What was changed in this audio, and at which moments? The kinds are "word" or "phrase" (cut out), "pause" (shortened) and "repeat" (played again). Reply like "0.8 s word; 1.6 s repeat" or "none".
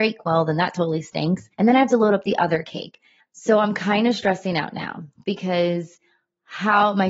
1.5 s pause; 3.2 s pause